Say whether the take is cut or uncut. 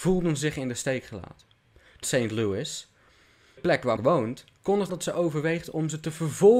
cut